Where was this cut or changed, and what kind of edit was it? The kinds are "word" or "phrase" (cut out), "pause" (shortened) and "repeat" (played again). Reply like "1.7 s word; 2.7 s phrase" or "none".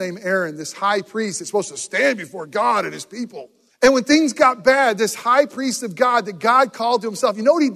3.7 s pause